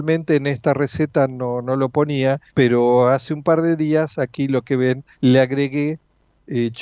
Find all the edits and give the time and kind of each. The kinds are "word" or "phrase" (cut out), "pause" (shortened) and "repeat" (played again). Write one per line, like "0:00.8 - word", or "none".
0:02.5 - pause
0:05.1 - pause